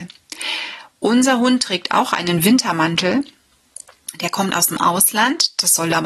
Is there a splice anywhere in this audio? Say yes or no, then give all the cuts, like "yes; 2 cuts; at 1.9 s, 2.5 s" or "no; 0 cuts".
no; 0 cuts